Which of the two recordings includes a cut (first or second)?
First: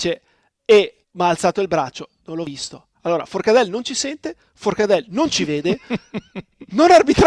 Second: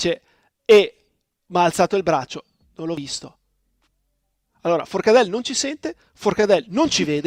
first